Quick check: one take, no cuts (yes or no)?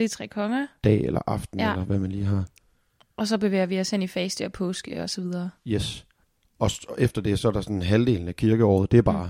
yes